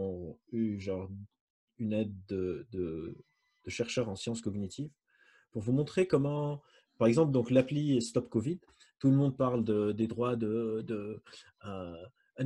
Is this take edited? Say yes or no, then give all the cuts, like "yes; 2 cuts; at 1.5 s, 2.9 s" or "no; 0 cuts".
no; 0 cuts